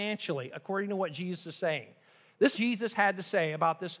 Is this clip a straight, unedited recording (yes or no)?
no